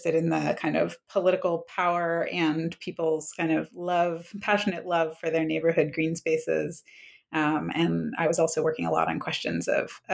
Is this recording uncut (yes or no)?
yes